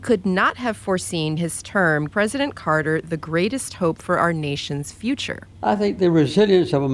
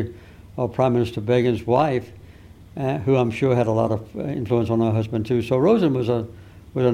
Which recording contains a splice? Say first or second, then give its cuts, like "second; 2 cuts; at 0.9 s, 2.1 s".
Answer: first; 3 cuts; at 1.4 s, 2.1 s, 5.5 s